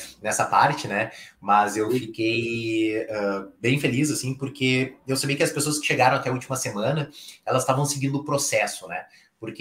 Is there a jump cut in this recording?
no; 0 cuts

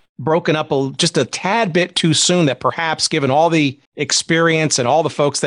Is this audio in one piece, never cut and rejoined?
no; 1 cut; at 3.9 s

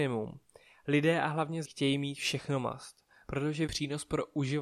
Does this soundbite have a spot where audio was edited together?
yes; 2 cuts; at 1.6 s, 3.7 s

